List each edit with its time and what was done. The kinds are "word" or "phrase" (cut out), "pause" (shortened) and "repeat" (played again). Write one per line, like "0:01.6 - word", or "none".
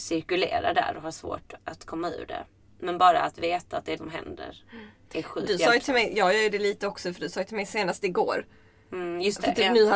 0:01.6 - word
0:04.0 - word